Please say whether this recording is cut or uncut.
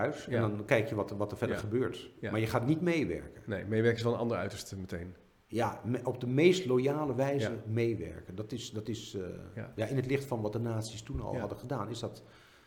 uncut